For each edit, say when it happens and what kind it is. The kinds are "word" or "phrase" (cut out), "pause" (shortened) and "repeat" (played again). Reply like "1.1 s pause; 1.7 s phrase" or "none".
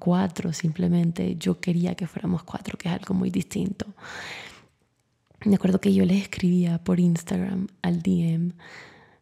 none